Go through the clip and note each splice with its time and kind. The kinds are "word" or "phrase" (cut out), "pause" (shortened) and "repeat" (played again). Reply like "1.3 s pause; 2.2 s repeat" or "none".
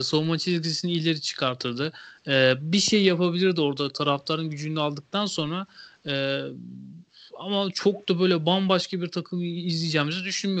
none